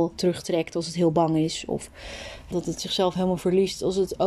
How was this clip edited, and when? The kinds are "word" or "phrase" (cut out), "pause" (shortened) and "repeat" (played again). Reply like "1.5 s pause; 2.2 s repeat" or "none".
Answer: 2.5 s word